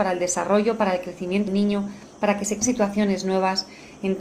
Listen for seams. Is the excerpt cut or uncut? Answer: cut